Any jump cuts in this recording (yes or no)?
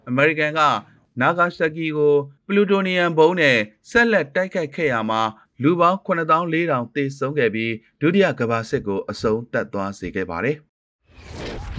yes